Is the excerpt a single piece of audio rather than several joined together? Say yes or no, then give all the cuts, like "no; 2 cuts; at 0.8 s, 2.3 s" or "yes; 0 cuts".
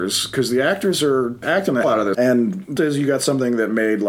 no; 4 cuts; at 1.4 s, 1.8 s, 2.1 s, 2.8 s